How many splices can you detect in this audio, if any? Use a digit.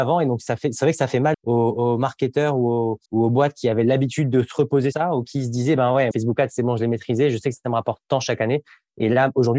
4